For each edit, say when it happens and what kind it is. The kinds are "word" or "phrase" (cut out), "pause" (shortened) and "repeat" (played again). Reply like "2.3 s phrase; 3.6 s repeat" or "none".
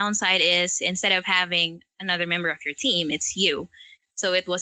none